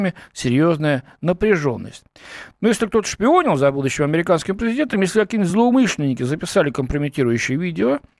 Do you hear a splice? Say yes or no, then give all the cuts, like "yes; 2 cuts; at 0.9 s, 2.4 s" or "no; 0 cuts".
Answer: no; 0 cuts